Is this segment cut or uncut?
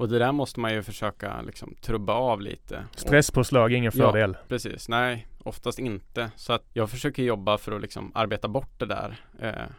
cut